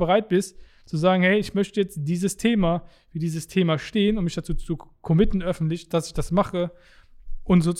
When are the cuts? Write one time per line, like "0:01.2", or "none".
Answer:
none